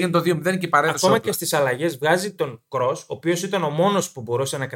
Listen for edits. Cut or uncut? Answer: uncut